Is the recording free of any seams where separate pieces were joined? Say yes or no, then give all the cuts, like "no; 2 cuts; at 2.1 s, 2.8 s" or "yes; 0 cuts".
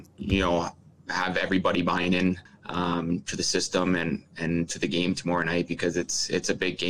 yes; 0 cuts